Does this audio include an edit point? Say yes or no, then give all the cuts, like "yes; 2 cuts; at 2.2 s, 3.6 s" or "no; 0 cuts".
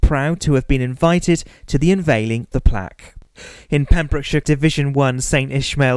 yes; 2 cuts; at 2.5 s, 4.4 s